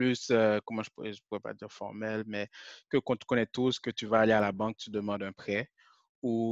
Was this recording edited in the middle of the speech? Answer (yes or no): no